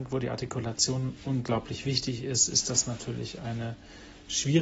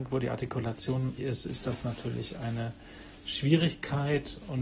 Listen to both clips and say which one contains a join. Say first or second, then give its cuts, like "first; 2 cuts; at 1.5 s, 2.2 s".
second; 1 cut; at 1.2 s